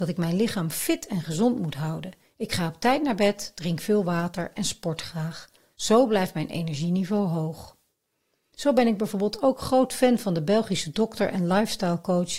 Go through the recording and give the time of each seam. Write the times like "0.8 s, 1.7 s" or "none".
none